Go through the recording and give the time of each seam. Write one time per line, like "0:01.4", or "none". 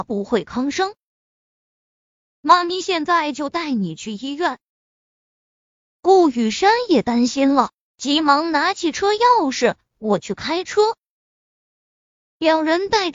none